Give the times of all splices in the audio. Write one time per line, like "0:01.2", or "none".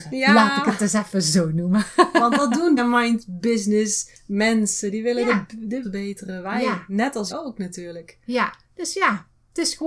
0:02.8
0:04.1
0:05.8
0:07.3
0:08.6